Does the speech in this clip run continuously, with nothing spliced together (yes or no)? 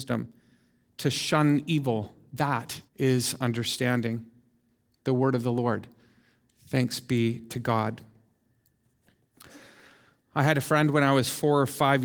no